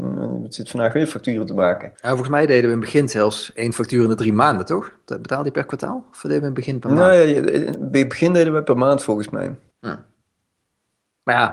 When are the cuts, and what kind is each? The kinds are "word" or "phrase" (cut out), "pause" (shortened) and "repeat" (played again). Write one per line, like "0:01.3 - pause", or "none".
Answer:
0:01.9 - pause